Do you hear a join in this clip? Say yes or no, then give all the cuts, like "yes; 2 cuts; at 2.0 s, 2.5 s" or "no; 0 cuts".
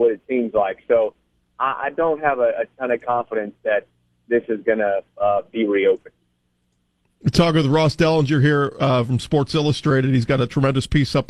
no; 0 cuts